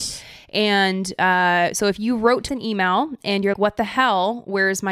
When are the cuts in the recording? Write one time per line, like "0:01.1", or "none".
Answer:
0:02.5
0:03.5

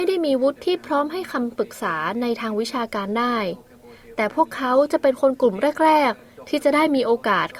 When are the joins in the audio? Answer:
none

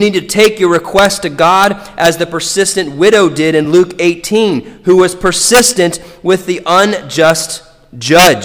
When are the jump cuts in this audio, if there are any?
none

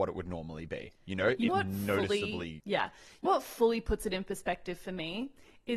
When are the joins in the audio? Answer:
0:01.5
0:03.3

